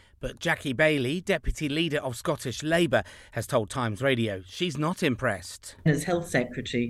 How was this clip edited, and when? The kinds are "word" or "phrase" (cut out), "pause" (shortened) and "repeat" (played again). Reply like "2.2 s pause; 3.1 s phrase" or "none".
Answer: none